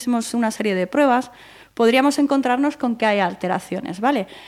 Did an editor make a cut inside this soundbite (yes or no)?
no